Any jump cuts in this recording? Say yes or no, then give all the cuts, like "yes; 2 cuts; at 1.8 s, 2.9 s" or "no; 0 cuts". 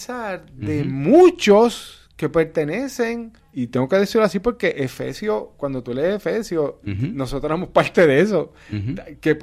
yes; 1 cut; at 3.4 s